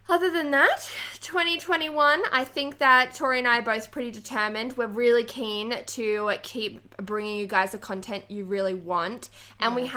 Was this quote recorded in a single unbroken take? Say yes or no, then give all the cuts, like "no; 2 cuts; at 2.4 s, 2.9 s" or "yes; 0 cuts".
yes; 0 cuts